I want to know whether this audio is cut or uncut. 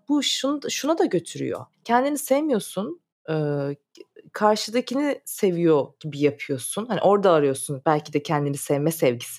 cut